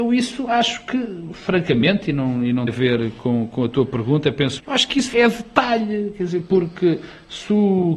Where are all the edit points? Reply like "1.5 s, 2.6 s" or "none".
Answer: 2.7 s, 4.6 s, 5.1 s